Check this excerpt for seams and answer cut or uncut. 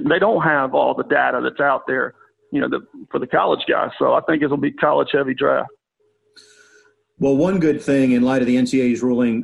uncut